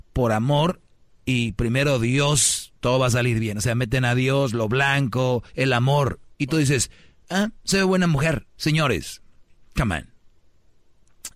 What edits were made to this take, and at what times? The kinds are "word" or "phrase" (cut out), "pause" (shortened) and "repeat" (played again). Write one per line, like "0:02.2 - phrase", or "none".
0:05.5 - pause
0:08.5 - pause